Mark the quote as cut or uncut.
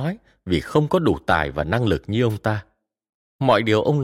uncut